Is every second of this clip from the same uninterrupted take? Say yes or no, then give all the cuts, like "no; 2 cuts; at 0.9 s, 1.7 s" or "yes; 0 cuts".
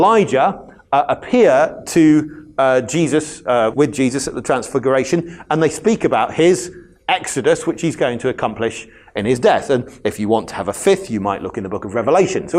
no; 1 cut; at 3.7 s